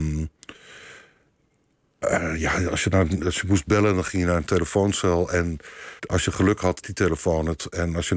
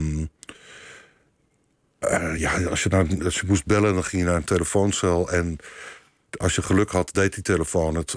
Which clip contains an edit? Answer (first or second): first